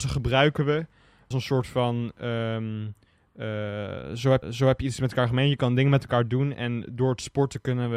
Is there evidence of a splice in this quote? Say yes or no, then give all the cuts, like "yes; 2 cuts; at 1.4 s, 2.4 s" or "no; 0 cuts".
yes; 2 cuts; at 1.3 s, 4.4 s